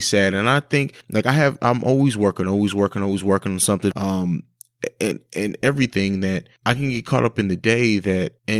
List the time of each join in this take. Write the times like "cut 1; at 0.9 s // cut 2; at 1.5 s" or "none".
cut 1; at 1.0 s